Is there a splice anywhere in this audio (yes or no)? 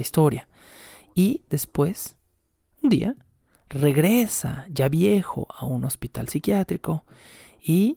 no